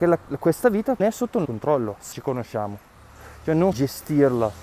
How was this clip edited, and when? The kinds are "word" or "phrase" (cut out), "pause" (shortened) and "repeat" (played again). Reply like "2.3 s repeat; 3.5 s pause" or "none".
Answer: 1.0 s word; 1.4 s word; 2.1 s word; 3.7 s word